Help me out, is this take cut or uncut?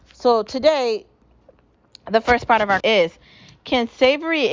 cut